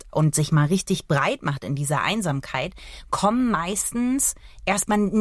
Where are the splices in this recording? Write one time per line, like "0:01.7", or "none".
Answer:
none